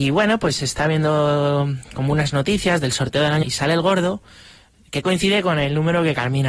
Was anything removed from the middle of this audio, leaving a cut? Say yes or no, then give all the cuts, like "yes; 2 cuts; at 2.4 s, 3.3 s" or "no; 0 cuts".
yes; 1 cut; at 3.4 s